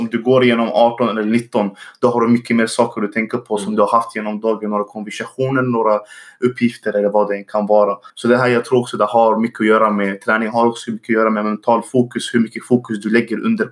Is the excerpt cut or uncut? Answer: cut